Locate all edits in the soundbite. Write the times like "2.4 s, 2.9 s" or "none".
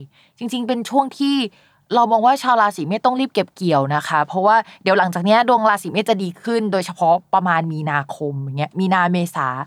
none

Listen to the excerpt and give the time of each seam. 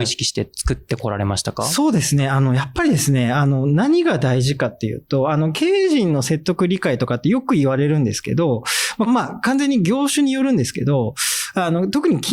9.1 s

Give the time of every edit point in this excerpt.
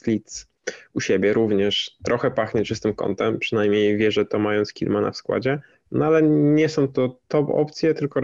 5.7 s

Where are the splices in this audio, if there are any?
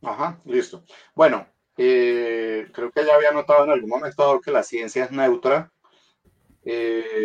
none

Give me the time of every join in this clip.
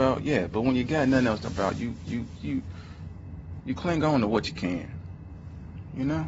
1.4 s, 2.1 s

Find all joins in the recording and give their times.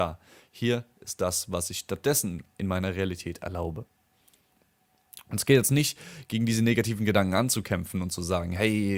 none

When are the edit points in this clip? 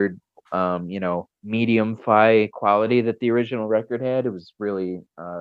1.3 s

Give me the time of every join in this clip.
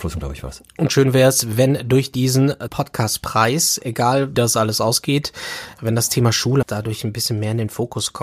2.7 s, 4.3 s, 6.6 s

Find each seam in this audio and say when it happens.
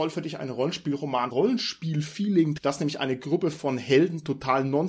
1.3 s, 2.6 s

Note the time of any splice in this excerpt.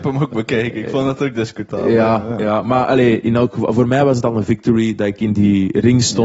none

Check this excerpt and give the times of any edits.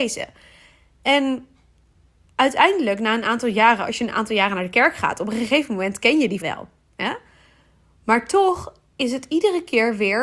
6.4 s

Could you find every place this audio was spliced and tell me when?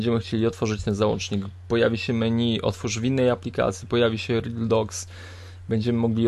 none

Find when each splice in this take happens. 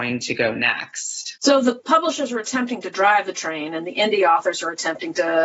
1.4 s

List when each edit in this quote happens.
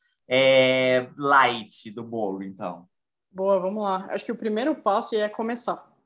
5.1 s

